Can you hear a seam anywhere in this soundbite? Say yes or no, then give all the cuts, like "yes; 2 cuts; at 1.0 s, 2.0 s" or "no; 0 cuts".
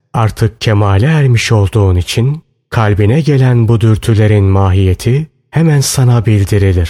no; 0 cuts